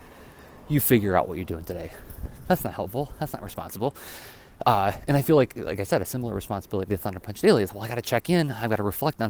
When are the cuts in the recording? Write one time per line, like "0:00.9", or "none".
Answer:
0:07.7